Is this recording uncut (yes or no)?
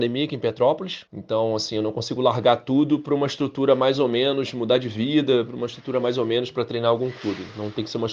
no